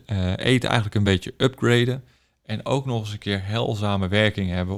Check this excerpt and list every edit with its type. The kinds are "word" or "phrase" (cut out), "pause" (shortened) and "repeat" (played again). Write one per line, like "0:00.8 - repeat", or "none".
none